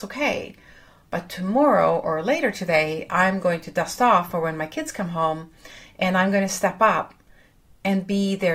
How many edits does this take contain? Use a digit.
0